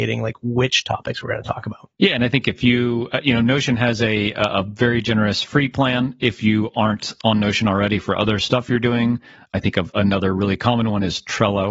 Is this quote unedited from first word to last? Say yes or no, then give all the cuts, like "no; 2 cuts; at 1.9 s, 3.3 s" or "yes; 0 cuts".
no; 1 cut; at 1.9 s